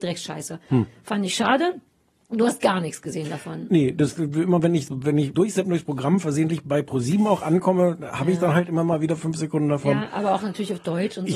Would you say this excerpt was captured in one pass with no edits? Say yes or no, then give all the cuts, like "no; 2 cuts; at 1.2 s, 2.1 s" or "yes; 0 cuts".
no; 2 cuts; at 4.9 s, 5.3 s